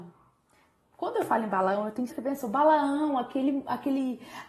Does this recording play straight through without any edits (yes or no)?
no